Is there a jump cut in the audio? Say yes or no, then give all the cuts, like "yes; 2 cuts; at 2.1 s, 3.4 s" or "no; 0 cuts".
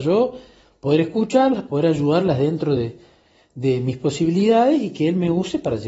no; 0 cuts